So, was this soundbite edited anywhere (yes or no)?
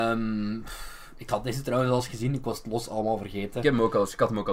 no